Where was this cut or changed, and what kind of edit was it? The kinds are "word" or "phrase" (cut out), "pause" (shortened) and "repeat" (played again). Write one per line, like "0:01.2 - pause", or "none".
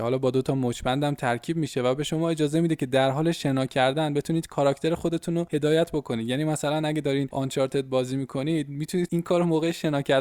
none

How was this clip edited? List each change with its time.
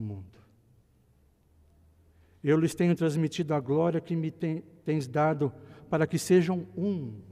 none

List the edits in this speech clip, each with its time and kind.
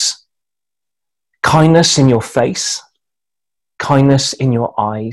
none

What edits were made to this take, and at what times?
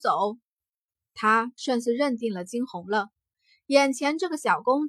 none

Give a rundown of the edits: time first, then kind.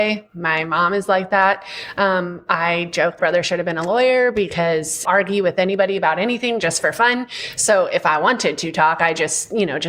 0:03.2 - word
0:05.0 - phrase

